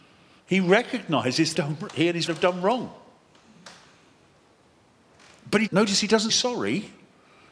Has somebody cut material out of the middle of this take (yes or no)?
yes